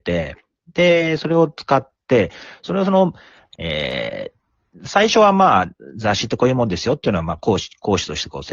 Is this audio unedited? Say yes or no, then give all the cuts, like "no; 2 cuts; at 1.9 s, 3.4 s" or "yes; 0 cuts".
yes; 0 cuts